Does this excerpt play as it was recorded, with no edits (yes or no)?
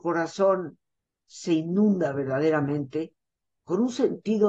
yes